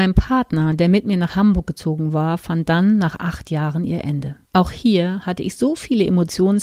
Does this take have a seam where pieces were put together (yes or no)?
yes